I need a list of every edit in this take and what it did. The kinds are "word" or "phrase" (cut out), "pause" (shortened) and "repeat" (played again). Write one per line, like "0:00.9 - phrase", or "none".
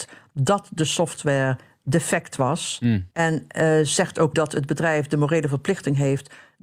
0:03.1 - pause
0:04.3 - word

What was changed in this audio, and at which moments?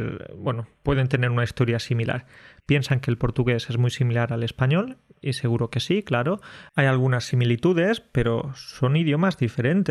none

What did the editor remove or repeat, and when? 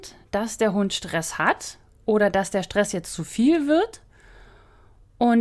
none

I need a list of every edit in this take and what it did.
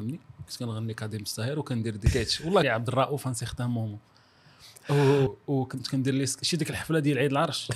0:02.6 - phrase
0:05.3 - word

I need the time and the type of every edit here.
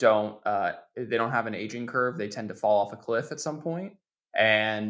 none

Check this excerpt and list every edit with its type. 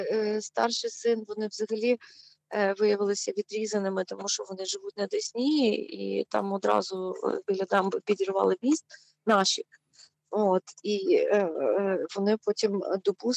none

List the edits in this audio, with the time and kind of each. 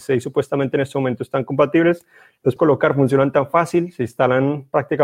0:02.6 - word

